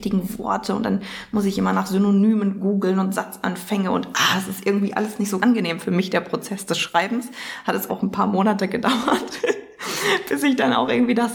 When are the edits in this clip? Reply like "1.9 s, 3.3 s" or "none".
5.4 s, 7.9 s